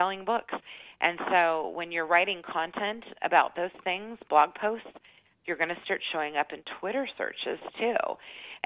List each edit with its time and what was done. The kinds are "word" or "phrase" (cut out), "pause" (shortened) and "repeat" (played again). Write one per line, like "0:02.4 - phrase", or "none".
none